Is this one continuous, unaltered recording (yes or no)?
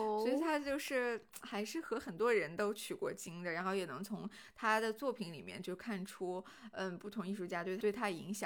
yes